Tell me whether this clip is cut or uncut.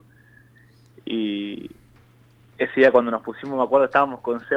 uncut